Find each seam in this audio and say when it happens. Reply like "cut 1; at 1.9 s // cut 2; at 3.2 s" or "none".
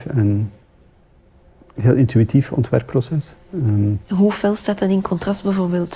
cut 1; at 4.0 s